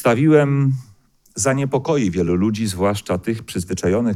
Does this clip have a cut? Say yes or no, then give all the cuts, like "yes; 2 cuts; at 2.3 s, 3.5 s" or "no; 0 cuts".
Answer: no; 0 cuts